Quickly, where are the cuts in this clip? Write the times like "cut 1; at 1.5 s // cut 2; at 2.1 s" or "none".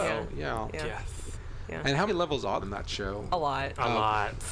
cut 1; at 2.1 s // cut 2; at 2.6 s